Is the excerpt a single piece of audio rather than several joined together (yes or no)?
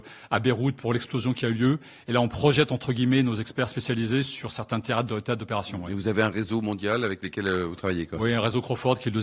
yes